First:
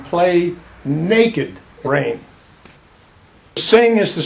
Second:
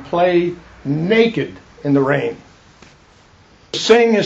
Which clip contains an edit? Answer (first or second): first